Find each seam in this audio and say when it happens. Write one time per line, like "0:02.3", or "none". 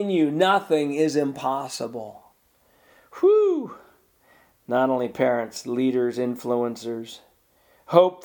none